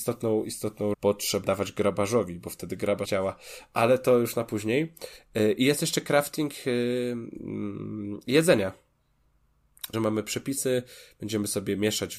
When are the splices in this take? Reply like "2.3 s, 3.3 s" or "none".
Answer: 0.9 s, 1.4 s, 3.1 s, 9.9 s